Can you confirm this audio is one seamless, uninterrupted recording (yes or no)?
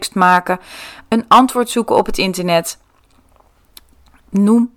yes